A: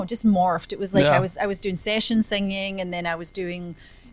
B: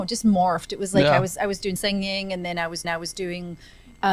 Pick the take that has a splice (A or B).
B